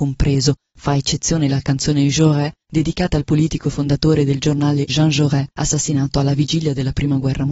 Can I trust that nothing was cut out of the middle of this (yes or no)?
no